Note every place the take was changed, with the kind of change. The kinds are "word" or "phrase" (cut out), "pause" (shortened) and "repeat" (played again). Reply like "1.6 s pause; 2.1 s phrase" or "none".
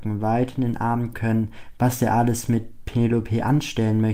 1.1 s word